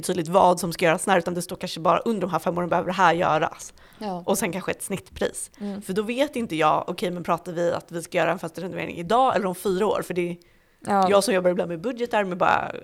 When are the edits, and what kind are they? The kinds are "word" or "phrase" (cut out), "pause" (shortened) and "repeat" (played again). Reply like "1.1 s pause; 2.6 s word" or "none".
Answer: none